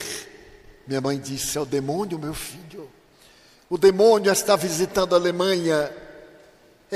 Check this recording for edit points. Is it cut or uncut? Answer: uncut